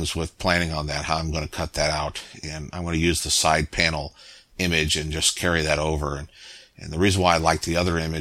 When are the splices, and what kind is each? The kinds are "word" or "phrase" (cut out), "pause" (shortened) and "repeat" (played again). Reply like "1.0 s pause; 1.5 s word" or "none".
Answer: none